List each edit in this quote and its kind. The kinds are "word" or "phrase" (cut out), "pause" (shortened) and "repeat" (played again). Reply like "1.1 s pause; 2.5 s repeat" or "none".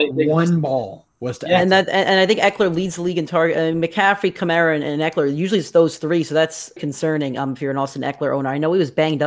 6.8 s word

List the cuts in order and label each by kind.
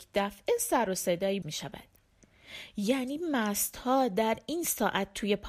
1.4 s word

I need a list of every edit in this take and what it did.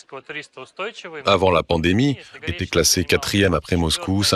2.4 s word

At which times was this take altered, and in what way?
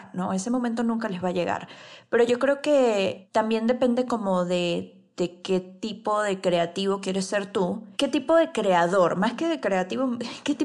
7.9 s pause

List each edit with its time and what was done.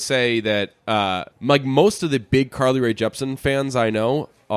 1.3 s pause

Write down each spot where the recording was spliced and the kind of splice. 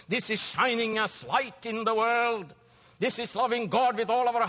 none

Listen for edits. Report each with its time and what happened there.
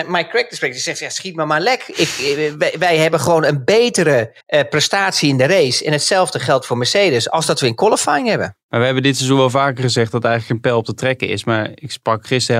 4.4 s pause

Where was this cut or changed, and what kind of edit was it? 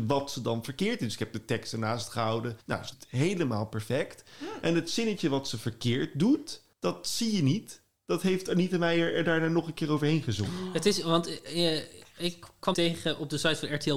2.6 s pause; 2.9 s word; 6.7 s pause; 12.7 s word

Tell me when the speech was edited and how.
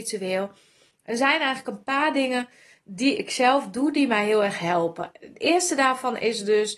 none

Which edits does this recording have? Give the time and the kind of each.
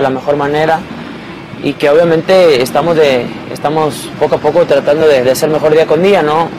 none

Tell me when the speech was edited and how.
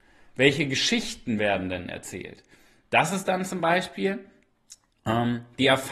none

